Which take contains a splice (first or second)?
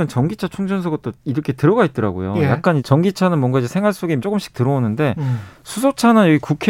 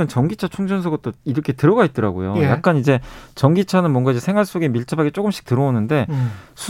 first